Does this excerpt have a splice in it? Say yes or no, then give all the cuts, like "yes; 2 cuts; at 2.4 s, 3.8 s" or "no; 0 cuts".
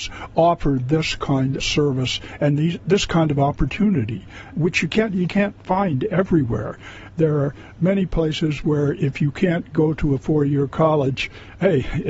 yes; 4 cuts; at 1.6 s, 4.5 s, 5.3 s, 7.8 s